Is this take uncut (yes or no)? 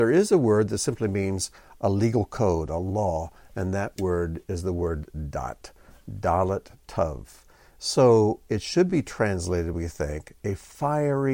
yes